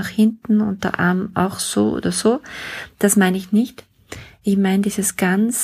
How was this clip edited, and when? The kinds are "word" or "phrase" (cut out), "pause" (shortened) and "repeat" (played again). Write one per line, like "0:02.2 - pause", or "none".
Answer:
none